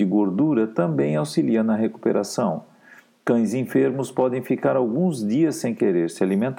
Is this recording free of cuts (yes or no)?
yes